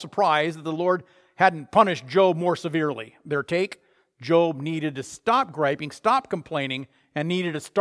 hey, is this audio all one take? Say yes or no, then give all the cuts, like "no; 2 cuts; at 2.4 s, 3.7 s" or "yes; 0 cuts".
yes; 0 cuts